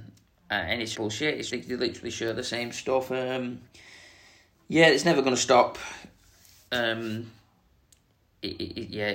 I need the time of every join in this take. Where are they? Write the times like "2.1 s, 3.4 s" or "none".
0.9 s, 1.5 s